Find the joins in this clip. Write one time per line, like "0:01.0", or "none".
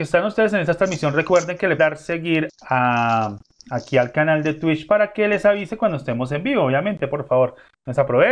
0:01.8
0:02.5

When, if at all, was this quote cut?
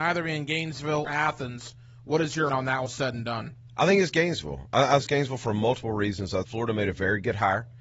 0:01.1
0:02.5
0:02.8
0:05.0
0:06.4

